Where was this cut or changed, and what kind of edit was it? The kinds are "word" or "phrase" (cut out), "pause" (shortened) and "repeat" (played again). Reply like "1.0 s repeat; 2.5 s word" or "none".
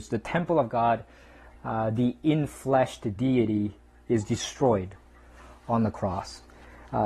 none